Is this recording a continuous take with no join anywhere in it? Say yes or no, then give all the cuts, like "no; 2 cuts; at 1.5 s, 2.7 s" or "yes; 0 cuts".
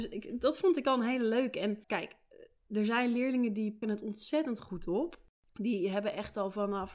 no; 2 cuts; at 1.8 s, 3.8 s